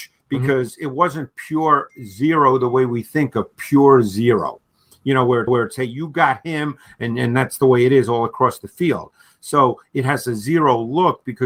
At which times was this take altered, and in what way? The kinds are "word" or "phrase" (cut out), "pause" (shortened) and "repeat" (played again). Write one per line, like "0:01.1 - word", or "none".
0:05.5 - repeat